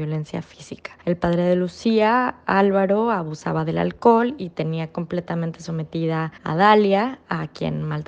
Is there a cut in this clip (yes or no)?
yes